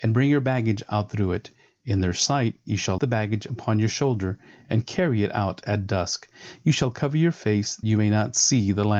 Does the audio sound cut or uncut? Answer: cut